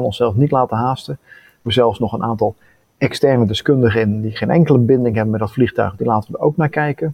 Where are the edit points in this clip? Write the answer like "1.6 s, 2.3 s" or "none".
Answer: 1.7 s